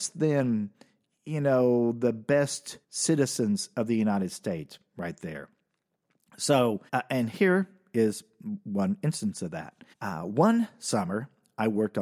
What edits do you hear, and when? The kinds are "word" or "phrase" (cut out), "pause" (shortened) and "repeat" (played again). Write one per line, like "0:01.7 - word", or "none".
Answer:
0:02.8 - pause
0:06.9 - pause
0:09.9 - pause